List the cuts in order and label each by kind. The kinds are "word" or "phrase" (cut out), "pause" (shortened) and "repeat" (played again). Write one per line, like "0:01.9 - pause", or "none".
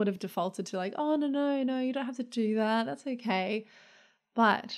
none